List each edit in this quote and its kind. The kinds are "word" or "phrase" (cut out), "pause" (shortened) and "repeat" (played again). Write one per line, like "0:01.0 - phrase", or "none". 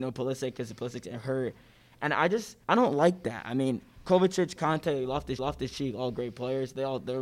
0:02.6 - pause
0:05.4 - repeat